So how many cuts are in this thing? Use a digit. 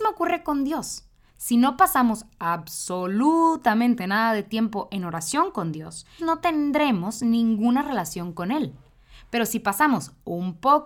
1